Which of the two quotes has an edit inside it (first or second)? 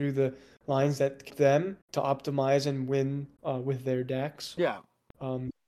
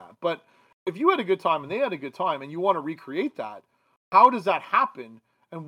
first